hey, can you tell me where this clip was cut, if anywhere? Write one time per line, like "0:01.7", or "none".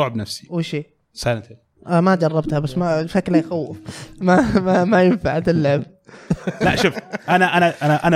none